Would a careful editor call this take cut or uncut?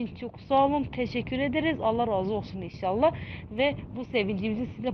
uncut